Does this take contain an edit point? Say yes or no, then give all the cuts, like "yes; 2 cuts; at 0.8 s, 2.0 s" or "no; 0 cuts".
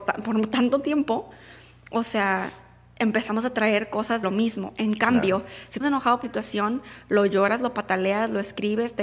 yes; 3 cuts; at 4.2 s, 5.8 s, 6.2 s